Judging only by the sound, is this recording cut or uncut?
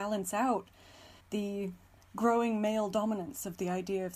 cut